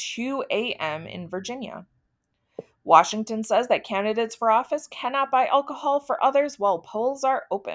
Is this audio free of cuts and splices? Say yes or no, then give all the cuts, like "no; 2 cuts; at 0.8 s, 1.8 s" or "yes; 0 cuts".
yes; 0 cuts